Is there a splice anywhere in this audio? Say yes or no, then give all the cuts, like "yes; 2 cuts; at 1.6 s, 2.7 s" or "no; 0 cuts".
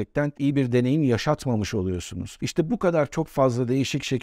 no; 0 cuts